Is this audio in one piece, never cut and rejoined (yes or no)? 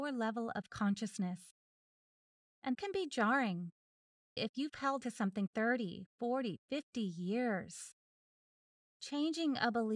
no